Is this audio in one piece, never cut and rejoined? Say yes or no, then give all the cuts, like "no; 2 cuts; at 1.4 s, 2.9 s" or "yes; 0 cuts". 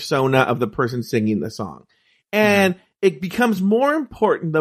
yes; 0 cuts